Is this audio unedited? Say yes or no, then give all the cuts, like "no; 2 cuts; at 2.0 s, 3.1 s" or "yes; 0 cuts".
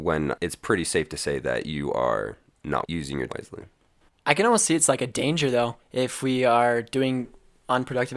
no; 3 cuts; at 2.8 s, 3.3 s, 5.8 s